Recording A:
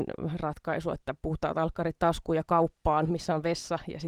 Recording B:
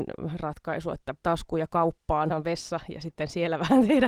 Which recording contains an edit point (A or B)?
B